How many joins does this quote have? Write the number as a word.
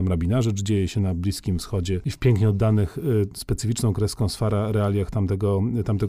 zero